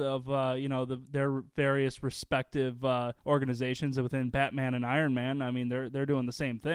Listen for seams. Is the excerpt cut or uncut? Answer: cut